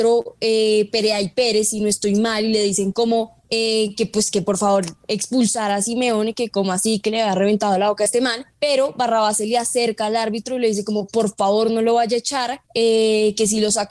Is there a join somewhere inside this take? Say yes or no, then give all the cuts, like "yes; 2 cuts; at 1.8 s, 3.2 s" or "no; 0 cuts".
yes; 3 cuts; at 3.4 s, 8.5 s, 12.7 s